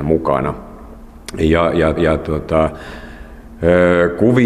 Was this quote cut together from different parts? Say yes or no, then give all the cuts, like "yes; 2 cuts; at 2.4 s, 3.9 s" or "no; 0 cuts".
yes; 1 cut; at 2.0 s